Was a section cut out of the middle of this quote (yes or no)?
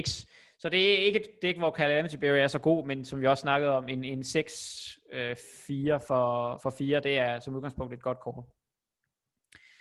no